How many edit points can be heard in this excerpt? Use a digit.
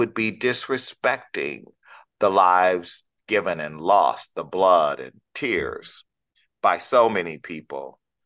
0